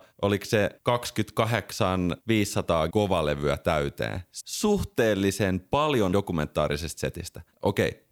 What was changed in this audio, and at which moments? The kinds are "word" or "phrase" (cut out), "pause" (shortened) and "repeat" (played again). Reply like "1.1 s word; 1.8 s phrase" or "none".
2.9 s word; 4.4 s word; 6.1 s word